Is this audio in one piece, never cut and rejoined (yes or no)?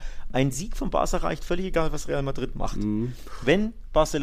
yes